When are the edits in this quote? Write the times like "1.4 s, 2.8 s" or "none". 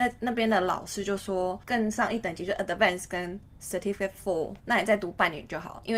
4.6 s